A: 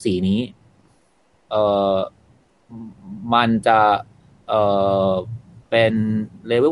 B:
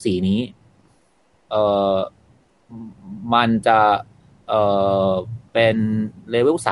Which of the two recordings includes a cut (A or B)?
B